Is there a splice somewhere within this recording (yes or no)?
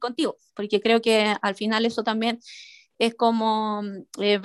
no